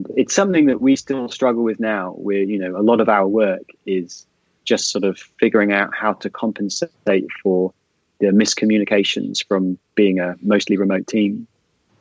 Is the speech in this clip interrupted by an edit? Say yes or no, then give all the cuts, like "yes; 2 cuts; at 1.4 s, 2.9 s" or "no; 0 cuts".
no; 0 cuts